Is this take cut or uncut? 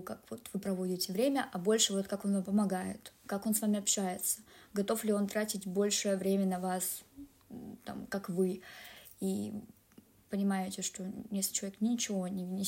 uncut